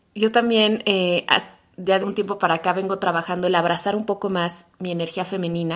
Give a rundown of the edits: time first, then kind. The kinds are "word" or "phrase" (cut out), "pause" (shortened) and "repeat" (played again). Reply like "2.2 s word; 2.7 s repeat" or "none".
2.0 s word